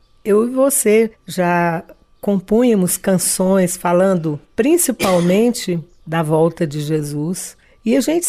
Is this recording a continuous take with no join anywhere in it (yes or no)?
yes